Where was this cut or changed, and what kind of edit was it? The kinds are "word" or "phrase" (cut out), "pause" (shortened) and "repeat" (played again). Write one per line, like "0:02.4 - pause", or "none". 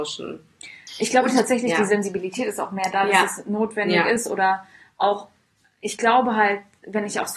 none